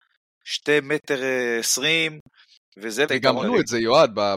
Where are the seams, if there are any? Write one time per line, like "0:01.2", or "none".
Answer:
0:03.1
0:03.4